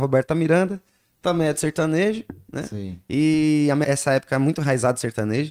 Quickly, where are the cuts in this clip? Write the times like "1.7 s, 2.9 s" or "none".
3.8 s